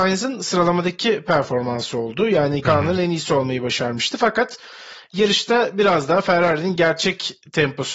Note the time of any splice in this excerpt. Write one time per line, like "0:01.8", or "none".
0:02.6

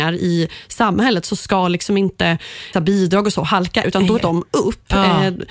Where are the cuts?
0:02.7
0:03.8
0:04.2

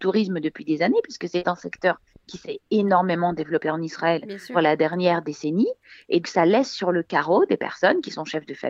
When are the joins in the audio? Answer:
0:04.5
0:06.2

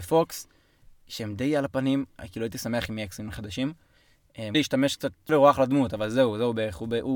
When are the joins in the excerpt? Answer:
0:04.5
0:05.3

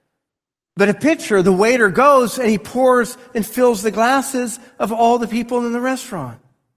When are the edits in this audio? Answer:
none

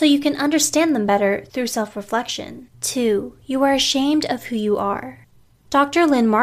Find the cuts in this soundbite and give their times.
0:02.7

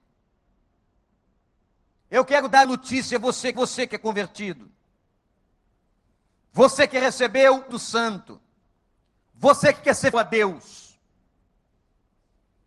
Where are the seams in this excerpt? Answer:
0:02.6
0:03.5
0:07.7
0:08.8
0:10.1

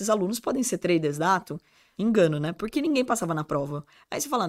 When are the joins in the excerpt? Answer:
0:01.9

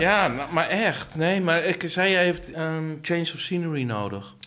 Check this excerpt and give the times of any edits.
0:02.5

